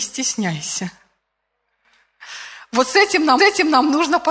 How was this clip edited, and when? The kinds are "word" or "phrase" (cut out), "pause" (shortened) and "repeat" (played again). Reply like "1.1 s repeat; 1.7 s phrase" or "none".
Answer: 3.4 s repeat